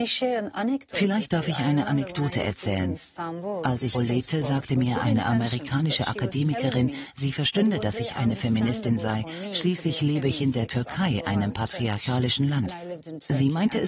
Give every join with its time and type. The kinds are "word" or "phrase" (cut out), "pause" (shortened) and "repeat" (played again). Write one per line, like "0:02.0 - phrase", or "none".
0:03.9 - phrase